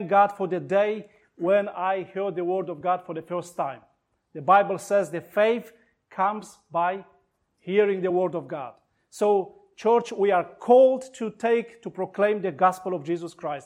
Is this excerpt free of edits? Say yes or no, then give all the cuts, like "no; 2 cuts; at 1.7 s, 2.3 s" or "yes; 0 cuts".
yes; 0 cuts